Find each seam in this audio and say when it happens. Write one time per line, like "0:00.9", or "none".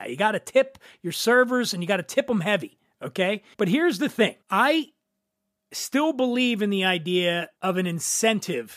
0:03.5
0:04.4
0:07.6